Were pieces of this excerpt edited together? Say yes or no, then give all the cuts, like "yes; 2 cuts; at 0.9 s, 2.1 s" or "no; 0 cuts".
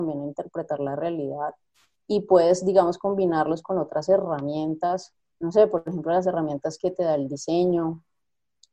no; 0 cuts